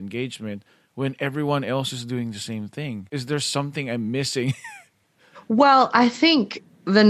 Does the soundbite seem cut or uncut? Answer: uncut